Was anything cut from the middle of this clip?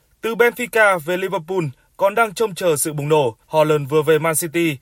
yes; 1 cut; at 3.4 s

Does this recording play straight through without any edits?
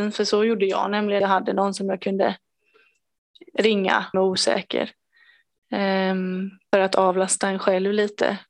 no; 3 cuts; at 1.2 s, 4.1 s, 6.7 s

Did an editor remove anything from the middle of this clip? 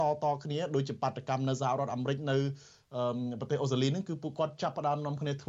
no; 0 cuts

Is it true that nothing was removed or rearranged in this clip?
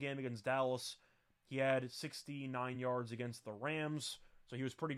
yes; 0 cuts

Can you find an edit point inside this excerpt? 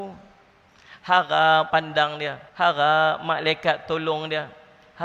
yes; 2 cuts; at 1.7 s, 2.5 s

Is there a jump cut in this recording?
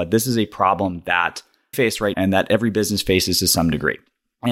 yes; 2 cuts; at 1.7 s, 2.1 s

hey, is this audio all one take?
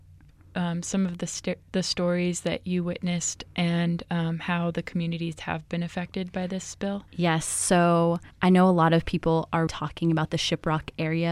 no; 3 cuts; at 7.1 s, 8.3 s, 9.7 s

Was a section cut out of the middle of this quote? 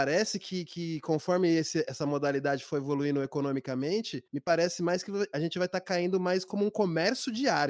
yes; 1 cut; at 4.3 s

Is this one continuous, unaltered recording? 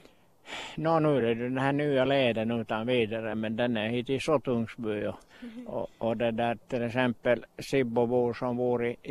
yes; 0 cuts

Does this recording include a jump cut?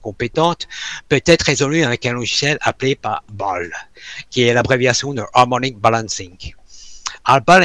yes; 1 cut; at 3.3 s

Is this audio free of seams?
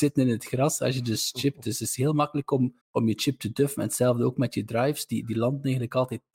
no; 1 cut; at 2.8 s

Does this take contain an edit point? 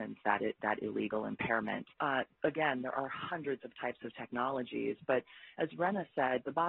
yes; 1 cut; at 1.9 s

